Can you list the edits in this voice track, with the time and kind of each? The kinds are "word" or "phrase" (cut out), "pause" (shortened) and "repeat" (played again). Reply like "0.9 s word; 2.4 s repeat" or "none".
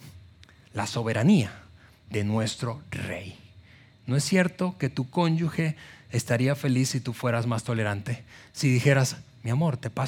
none